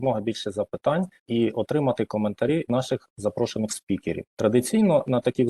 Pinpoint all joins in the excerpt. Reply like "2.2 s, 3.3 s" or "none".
1.2 s, 2.7 s, 4.3 s